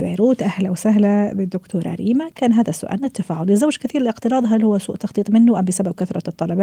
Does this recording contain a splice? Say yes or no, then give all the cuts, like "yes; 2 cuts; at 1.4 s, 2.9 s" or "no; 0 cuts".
no; 0 cuts